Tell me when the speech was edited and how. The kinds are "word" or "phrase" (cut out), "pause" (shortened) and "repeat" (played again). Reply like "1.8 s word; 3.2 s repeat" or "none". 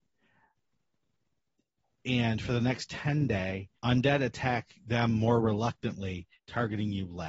3.8 s pause; 6.4 s pause